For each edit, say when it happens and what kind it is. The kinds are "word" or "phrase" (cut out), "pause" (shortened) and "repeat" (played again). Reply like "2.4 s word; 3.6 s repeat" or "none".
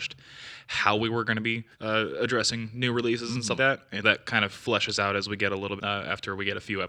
1.7 s pause; 3.6 s word; 4.0 s word; 5.8 s phrase